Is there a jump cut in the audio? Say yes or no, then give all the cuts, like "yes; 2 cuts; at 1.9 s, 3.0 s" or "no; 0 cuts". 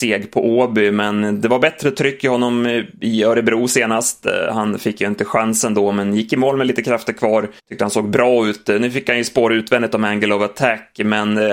yes; 1 cut; at 7.6 s